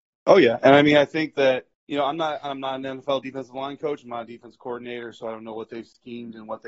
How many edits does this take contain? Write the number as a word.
one